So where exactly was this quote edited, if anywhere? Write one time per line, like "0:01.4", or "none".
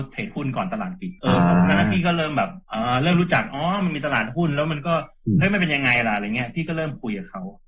0:01.2
0:02.6